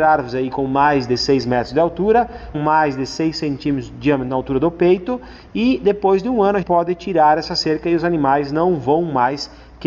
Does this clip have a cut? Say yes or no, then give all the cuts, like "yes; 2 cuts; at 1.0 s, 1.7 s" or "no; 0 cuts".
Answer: yes; 2 cuts; at 2.5 s, 6.6 s